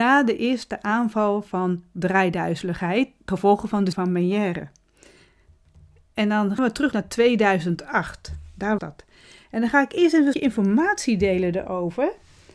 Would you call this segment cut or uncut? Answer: cut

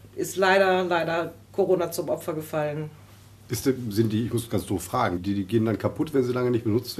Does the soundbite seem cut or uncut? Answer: cut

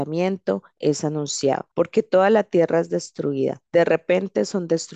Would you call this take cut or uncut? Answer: cut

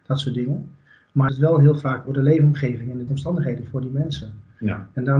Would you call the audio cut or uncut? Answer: cut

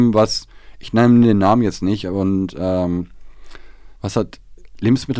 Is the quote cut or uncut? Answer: cut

